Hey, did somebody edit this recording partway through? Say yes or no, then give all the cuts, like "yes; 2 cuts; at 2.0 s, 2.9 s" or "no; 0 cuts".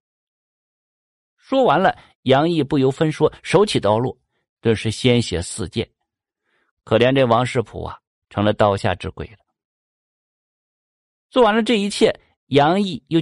no; 0 cuts